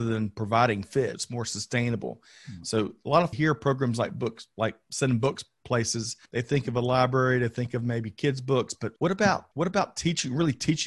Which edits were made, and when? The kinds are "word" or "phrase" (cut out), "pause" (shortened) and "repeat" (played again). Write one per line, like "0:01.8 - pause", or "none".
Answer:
0:01.1 - word
0:03.3 - phrase
0:06.3 - pause
0:09.0 - pause
0:09.5 - pause